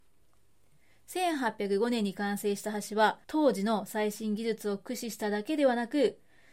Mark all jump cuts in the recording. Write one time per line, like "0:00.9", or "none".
0:03.2